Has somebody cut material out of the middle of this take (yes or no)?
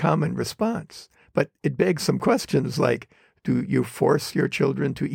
no